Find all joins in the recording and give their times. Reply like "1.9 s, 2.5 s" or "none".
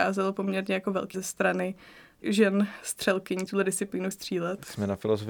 1.1 s, 2.2 s, 3.5 s, 4.1 s